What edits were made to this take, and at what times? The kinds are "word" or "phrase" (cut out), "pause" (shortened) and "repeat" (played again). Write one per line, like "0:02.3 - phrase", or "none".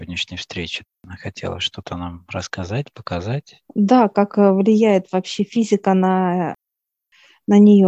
0:00.9 - pause
0:03.7 - pause